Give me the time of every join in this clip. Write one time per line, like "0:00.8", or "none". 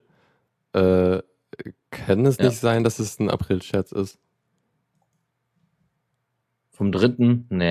none

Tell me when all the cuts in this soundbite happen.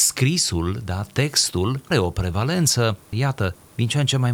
0:01.9
0:03.0

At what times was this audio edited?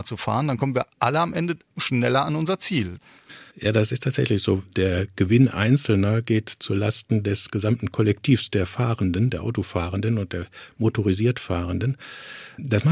0:03.5

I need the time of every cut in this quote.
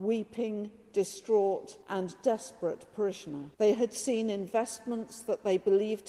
0:01.8
0:03.5

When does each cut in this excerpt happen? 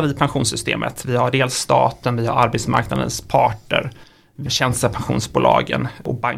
0:04.5

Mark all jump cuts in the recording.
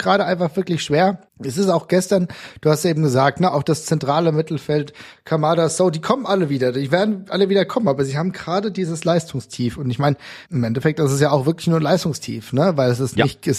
0:01.3
0:10.5

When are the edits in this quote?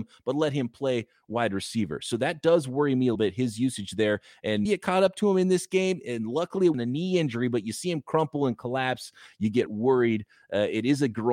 0:03.1
0:04.6
0:06.7
0:09.7

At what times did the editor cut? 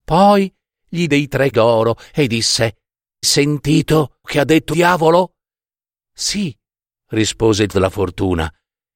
0:01.1
0:01.5
0:03.2
0:04.2
0:04.7
0:07.7

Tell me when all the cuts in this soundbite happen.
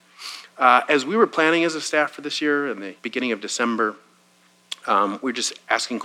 0:03.0

